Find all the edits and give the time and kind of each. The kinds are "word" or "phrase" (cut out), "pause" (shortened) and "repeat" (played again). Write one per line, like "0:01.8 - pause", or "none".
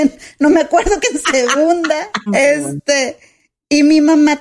0:01.0 - word
0:02.3 - word